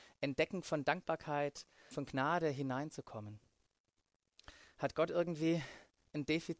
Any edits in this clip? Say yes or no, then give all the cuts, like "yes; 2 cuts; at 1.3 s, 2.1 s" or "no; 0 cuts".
yes; 1 cut; at 1.9 s